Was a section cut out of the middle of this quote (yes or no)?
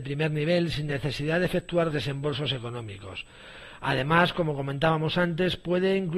yes